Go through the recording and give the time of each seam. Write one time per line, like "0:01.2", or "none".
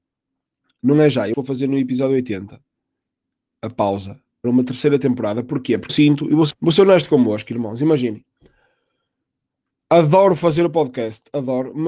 0:01.3
0:04.4
0:05.9
0:06.5

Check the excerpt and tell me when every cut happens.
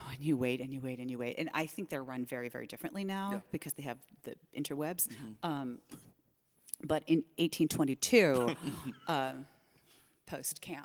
none

